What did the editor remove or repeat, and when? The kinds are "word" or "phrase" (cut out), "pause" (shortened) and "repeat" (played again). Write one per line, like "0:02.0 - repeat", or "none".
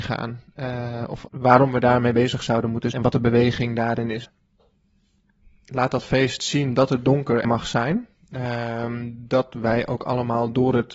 0:01.3 - word
0:02.9 - word
0:07.4 - word